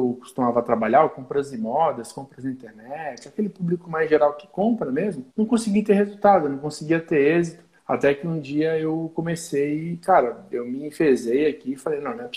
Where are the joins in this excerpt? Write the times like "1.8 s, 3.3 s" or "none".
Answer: 5.3 s, 7.8 s